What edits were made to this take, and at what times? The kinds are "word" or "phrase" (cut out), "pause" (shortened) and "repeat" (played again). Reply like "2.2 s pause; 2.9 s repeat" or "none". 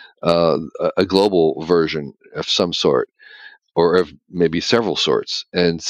none